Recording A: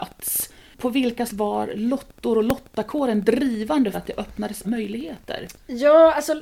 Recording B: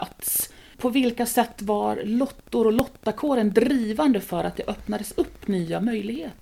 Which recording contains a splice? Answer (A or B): A